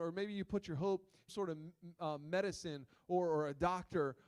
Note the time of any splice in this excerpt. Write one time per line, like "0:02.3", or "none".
0:01.3